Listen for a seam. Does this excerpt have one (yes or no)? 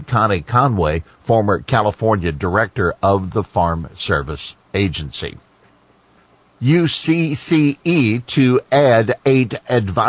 no